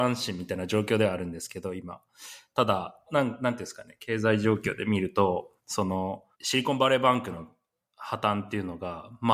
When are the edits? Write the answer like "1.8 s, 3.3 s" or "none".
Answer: 3.1 s, 5.6 s, 6.3 s